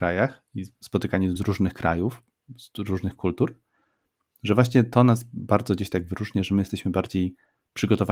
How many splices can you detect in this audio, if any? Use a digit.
1